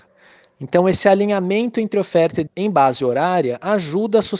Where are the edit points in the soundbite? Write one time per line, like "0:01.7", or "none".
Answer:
0:02.5